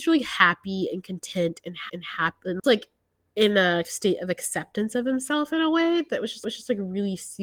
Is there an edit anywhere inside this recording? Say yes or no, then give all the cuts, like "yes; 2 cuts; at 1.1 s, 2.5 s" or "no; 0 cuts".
yes; 4 cuts; at 1.9 s, 2.6 s, 3.8 s, 6.4 s